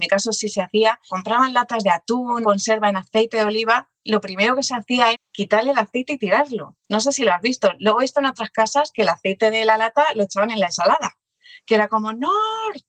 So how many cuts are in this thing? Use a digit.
4